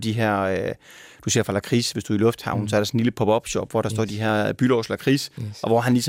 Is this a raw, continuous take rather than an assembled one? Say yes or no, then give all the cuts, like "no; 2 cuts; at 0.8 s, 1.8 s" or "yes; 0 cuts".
yes; 0 cuts